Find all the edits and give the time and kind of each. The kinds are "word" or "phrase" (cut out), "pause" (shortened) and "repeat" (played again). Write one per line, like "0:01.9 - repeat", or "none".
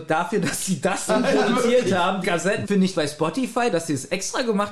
0:01.1 - word
0:02.2 - word
0:02.6 - word
0:02.9 - word
0:03.7 - word